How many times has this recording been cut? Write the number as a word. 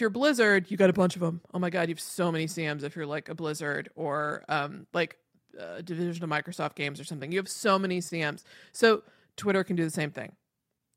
zero